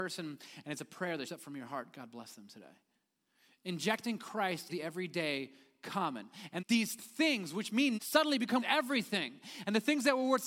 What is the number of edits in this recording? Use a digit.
5